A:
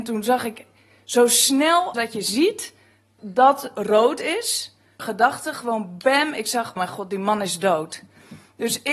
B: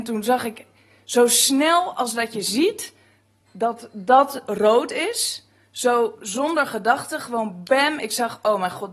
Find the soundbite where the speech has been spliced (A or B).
A